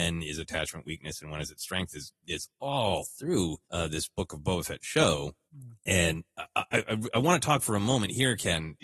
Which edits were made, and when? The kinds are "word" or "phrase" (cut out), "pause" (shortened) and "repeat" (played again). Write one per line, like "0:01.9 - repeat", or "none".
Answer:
0:03.6 - pause
0:05.5 - pause
0:06.3 - pause